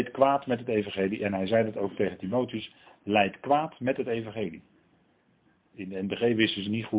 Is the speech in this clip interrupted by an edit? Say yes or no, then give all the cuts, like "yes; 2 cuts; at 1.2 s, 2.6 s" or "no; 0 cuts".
no; 0 cuts